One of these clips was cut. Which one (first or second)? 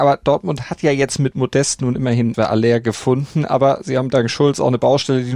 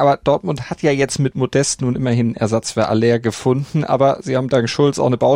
first